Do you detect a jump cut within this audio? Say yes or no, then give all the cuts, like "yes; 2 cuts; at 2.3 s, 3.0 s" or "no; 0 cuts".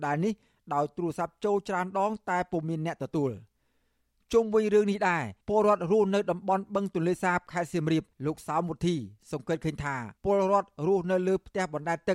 yes; 3 cuts; at 5.4 s, 8.1 s, 10.2 s